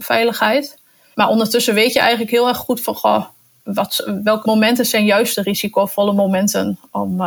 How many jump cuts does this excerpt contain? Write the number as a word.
zero